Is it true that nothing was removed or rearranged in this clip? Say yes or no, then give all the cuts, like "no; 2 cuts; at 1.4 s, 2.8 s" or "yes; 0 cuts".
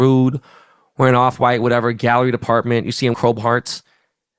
no; 1 cut; at 3.1 s